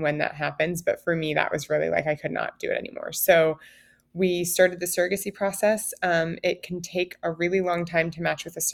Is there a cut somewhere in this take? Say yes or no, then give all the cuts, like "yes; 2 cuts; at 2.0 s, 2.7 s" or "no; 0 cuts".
no; 0 cuts